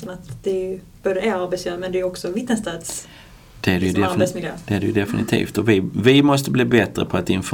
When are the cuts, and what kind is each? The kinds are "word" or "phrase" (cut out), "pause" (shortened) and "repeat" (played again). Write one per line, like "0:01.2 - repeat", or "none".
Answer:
none